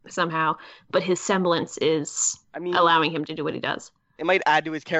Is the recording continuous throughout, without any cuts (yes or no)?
no